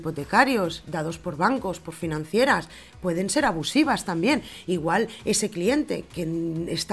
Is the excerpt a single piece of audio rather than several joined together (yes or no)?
yes